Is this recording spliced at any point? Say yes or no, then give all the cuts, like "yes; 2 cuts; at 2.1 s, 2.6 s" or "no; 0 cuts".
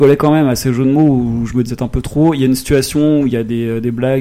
yes; 1 cut; at 1.7 s